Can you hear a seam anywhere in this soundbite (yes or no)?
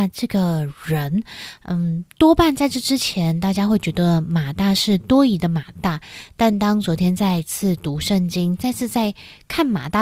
no